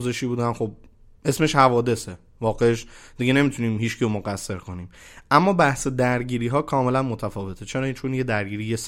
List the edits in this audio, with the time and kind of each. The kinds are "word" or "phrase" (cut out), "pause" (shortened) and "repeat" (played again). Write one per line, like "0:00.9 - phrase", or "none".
none